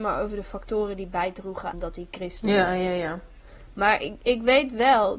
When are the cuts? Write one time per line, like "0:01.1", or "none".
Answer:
0:01.7